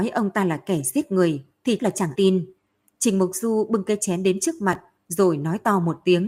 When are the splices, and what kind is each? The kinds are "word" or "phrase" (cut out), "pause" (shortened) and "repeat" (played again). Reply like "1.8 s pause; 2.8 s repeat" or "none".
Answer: 1.8 s word; 2.2 s word

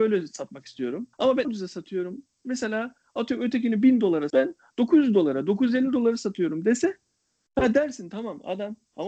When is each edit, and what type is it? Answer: 1.1 s pause; 1.4 s phrase; 4.3 s word

